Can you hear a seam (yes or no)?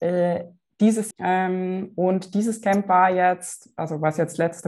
yes